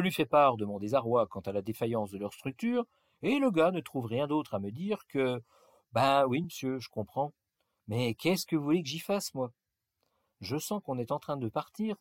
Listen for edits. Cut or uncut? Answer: uncut